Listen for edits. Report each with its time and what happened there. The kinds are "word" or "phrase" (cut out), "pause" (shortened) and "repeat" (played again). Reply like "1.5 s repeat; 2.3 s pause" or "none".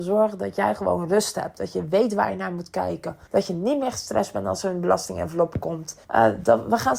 3.3 s pause; 6.0 s pause